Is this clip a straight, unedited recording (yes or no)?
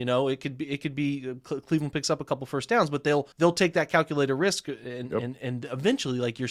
no